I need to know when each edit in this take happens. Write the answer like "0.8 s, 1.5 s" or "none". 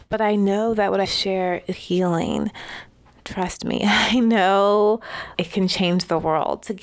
1.0 s, 1.7 s, 5.3 s

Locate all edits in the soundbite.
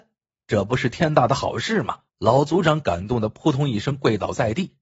2.1 s

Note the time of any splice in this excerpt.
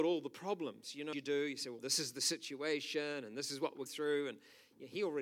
1.1 s, 1.8 s, 3.9 s

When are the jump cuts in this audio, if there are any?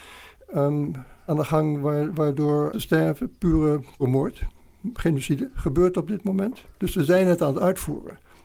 1.3 s, 2.7 s, 4.0 s

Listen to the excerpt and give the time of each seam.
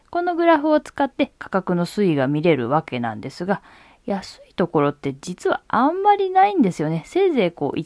none

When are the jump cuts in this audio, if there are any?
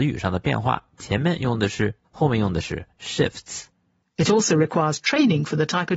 2.0 s

